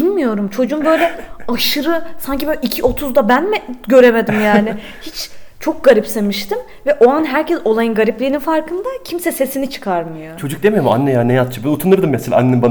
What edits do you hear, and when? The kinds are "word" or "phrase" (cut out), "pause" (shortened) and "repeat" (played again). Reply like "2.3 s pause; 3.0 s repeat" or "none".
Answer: none